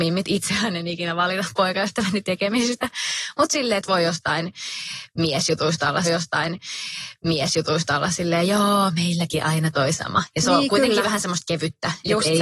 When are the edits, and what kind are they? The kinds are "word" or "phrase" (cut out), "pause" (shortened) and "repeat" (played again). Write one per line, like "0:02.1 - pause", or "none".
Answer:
0:06.0 - repeat